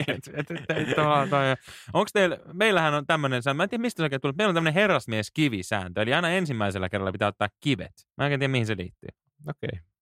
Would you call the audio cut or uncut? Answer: cut